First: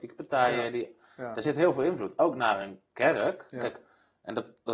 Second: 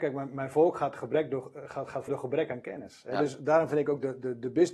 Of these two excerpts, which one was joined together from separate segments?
second; 1 cut; at 2.1 s

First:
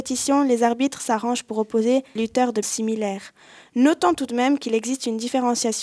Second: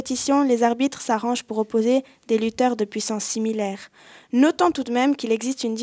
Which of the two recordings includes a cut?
first; 2 cuts; at 2.2 s, 2.6 s

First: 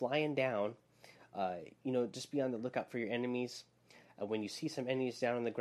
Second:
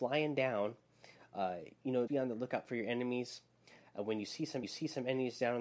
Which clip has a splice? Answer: second; 2 cuts; at 2.1 s, 4.6 s

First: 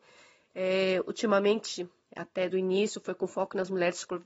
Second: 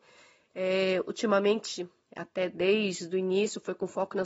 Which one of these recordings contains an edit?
first; 1 cut; at 2.5 s

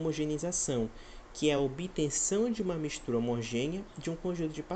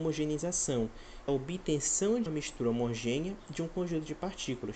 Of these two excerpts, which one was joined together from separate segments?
second; 2 cuts; at 1.3 s, 2.3 s

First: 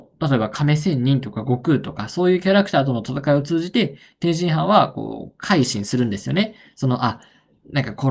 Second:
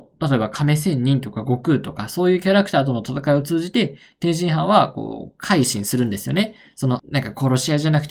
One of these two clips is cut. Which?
second; 1 cut; at 7.0 s

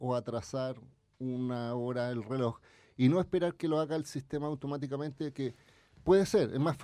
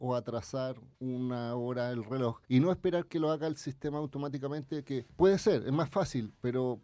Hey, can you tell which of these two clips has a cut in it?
second; 3 cuts; at 0.9 s, 2.4 s, 5.1 s

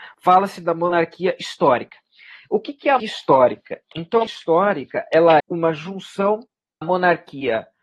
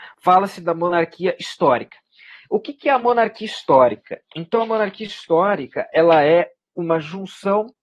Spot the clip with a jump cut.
first; 4 cuts; at 3.0 s, 4.3 s, 5.4 s, 6.8 s

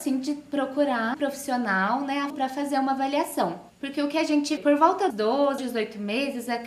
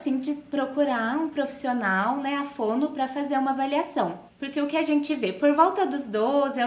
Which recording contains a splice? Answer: first; 5 cuts; at 1.1 s, 2.3 s, 4.6 s, 5.1 s, 5.6 s

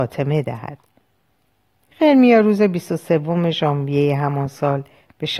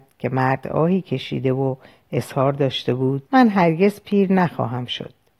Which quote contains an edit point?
second; 1 cut; at 3.3 s

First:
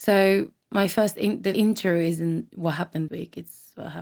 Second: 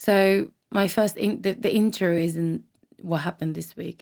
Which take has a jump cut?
first; 3 cuts; at 1.5 s, 2.5 s, 3.1 s

